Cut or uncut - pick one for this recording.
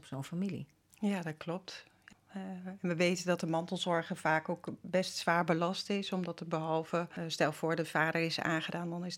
uncut